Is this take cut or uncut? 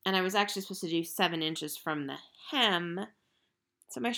uncut